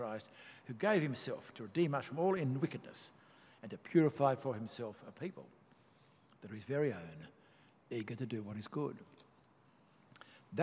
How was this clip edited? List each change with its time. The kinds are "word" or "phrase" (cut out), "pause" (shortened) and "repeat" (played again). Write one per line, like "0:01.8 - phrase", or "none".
none